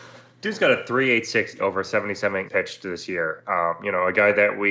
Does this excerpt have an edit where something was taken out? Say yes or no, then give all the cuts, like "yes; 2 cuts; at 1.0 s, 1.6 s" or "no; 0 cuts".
yes; 2 cuts; at 1.6 s, 2.5 s